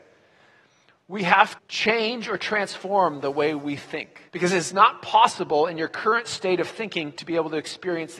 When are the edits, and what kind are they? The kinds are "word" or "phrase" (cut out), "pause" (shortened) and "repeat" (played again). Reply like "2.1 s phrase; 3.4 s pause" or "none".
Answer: 1.6 s word; 4.3 s pause